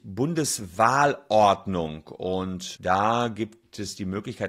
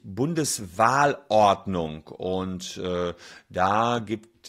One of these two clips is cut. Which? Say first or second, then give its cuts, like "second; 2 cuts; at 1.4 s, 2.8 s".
first; 1 cut; at 2.7 s